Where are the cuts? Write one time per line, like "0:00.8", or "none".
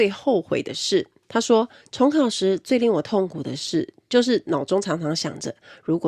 0:01.8

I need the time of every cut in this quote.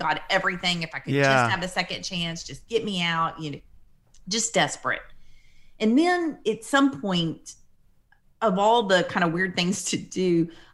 none

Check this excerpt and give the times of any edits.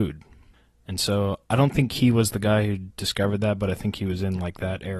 0:01.4

